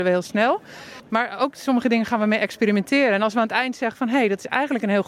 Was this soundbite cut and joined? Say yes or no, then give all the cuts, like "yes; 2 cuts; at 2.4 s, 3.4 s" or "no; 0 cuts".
no; 0 cuts